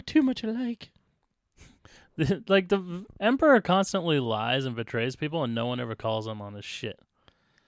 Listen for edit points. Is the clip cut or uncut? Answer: uncut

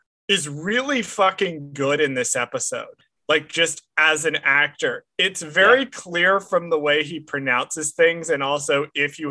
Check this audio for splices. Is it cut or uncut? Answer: uncut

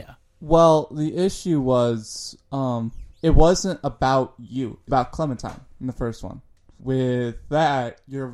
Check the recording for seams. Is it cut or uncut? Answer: cut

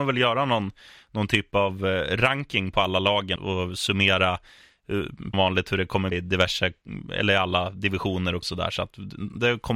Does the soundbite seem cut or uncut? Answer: cut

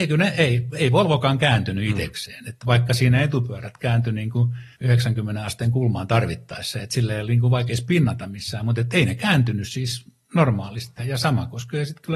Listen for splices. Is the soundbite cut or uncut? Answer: cut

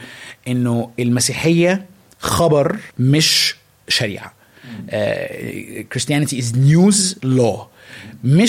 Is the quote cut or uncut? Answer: cut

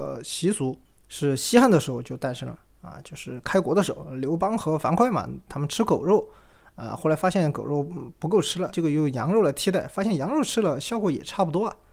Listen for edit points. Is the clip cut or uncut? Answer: cut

